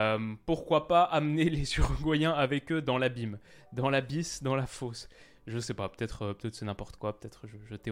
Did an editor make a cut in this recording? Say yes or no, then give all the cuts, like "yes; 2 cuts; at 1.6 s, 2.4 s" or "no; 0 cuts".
no; 0 cuts